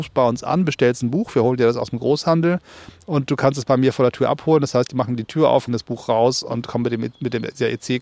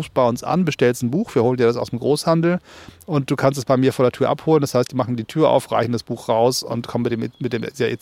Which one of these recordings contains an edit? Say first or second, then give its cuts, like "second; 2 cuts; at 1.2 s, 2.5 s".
first; 1 cut; at 5.7 s